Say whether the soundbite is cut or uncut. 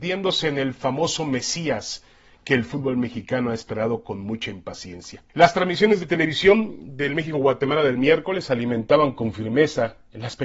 cut